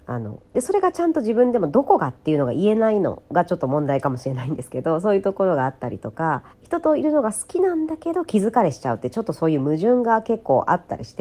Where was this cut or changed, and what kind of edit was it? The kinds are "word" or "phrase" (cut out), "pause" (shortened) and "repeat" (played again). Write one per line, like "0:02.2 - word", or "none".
0:06.5 - pause